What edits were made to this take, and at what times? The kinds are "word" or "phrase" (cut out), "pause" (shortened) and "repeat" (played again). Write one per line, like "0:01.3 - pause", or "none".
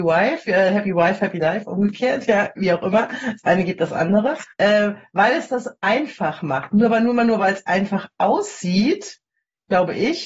0:04.5 - pause